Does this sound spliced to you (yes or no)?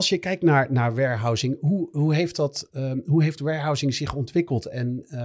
no